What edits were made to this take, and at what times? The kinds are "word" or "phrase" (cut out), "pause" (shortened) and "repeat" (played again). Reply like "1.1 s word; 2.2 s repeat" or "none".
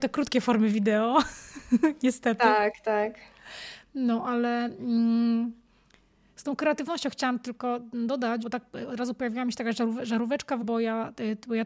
8.4 s word; 10.6 s word